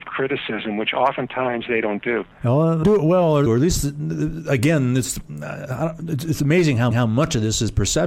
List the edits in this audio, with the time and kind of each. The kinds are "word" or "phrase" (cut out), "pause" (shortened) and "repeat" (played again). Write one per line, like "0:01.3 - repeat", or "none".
0:02.3 - pause
0:02.8 - word
0:03.5 - phrase
0:06.9 - repeat